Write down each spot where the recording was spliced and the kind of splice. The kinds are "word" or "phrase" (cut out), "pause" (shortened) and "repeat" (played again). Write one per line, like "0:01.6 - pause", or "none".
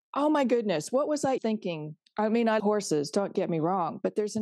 0:01.4 - word
0:02.6 - word
0:03.3 - word